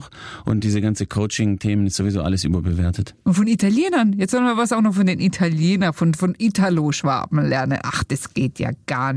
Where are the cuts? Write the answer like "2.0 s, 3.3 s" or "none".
3.2 s

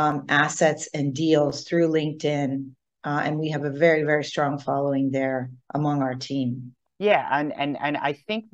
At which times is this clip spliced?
5.6 s, 6.9 s

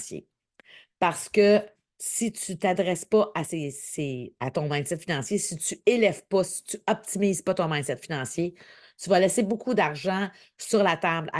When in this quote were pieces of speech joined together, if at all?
none

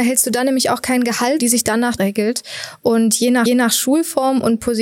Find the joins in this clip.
1.4 s, 2.0 s, 3.5 s

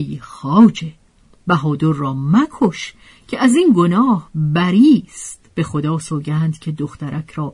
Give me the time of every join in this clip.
5.5 s

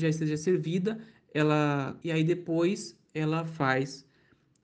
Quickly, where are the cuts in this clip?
2.0 s

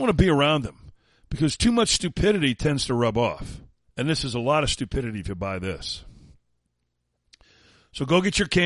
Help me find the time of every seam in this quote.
3.9 s

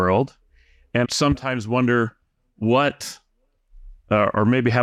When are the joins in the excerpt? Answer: 1.0 s

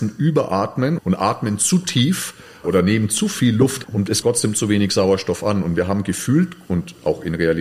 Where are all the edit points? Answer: 1.0 s, 2.6 s, 3.8 s, 4.2 s

